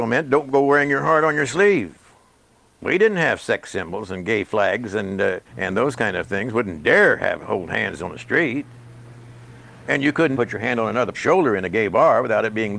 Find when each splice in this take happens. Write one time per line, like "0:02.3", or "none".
0:05.5
0:10.4
0:11.1